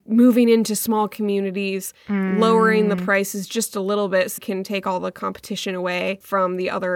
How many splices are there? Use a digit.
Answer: 1